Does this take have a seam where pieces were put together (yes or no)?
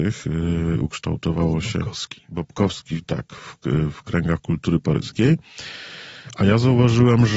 no